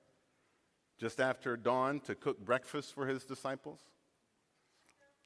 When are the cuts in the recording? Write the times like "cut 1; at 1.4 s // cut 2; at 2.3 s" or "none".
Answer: none